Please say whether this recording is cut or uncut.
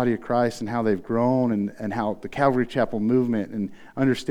uncut